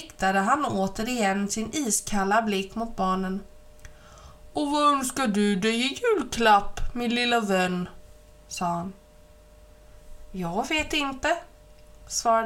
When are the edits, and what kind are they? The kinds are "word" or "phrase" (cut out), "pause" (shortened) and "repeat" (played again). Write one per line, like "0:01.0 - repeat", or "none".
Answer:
none